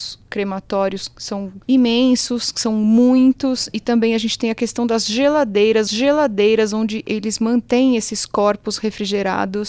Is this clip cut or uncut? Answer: cut